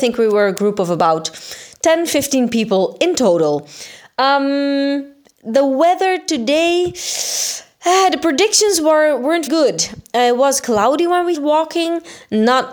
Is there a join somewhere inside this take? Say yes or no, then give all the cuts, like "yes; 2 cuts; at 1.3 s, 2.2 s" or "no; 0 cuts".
yes; 3 cuts; at 9.5 s, 10.6 s, 11.3 s